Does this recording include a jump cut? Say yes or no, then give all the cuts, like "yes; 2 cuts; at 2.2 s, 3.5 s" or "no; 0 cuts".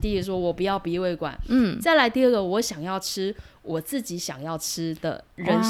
no; 0 cuts